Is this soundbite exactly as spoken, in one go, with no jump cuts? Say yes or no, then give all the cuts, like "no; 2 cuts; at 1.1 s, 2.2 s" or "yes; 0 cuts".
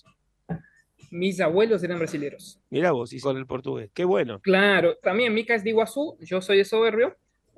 no; 3 cuts; at 2.7 s, 3.2 s, 5.0 s